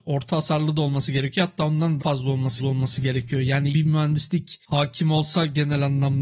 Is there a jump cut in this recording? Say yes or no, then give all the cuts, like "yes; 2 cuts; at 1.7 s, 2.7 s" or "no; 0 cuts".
yes; 3 cuts; at 2.0 s, 2.6 s, 3.7 s